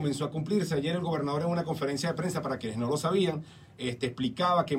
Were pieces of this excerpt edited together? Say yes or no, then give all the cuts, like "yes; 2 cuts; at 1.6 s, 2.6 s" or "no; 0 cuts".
no; 0 cuts